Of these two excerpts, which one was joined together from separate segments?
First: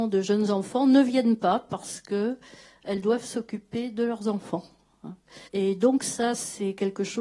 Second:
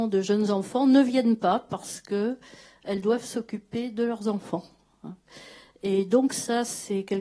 first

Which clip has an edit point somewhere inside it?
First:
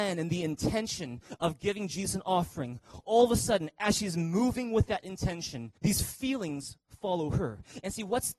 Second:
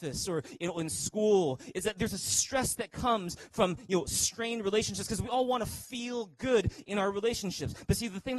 first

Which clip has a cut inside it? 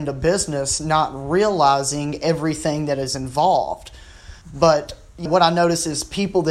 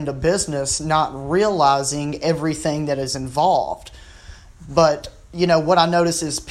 first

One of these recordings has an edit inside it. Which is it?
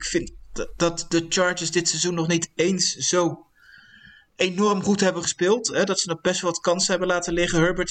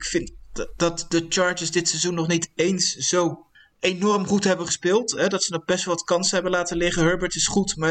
second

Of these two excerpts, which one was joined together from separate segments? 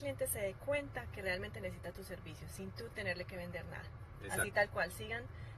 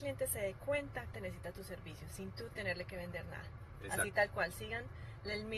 second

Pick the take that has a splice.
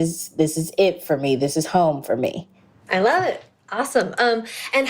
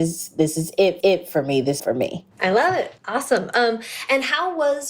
second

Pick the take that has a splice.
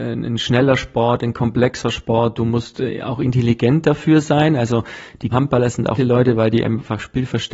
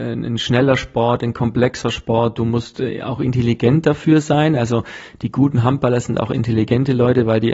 first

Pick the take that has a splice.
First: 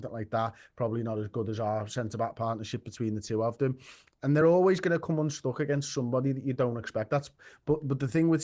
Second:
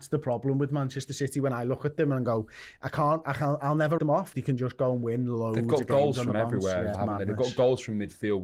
second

